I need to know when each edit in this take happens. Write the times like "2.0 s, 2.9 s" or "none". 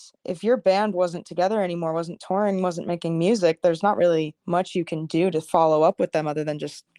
none

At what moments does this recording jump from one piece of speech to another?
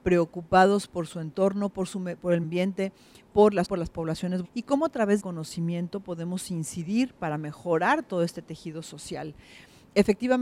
2.4 s, 3.6 s, 4.4 s, 5.2 s

